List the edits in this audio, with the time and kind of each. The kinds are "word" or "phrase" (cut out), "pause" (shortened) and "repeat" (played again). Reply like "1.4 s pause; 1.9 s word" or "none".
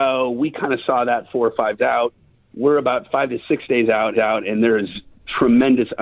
1.8 s word; 2.3 s pause; 4.1 s repeat